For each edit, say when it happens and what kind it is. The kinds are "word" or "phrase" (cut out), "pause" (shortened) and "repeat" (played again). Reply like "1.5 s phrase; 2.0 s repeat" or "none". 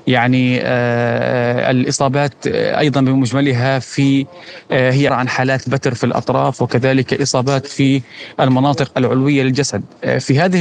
5.1 s word